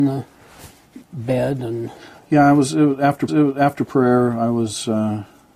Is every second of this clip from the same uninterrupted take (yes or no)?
no